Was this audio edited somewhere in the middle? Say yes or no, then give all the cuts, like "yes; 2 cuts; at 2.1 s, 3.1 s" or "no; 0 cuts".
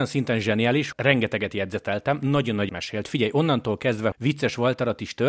yes; 3 cuts; at 0.9 s, 2.7 s, 4.1 s